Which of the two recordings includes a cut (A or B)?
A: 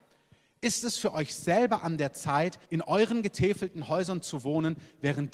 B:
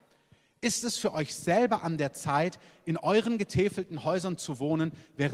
A